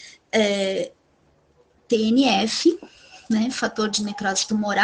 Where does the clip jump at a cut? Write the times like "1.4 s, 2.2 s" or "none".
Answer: none